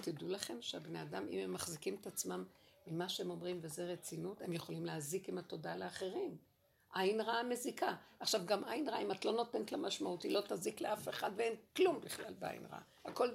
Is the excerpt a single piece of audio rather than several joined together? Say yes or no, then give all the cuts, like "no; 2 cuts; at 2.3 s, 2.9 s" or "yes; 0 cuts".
yes; 0 cuts